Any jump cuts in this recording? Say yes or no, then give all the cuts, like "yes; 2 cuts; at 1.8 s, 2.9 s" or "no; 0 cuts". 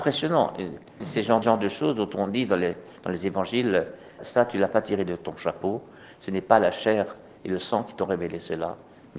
yes; 2 cuts; at 1.4 s, 4.2 s